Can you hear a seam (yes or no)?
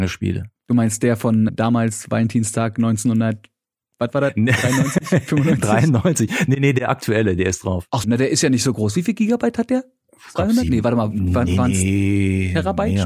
yes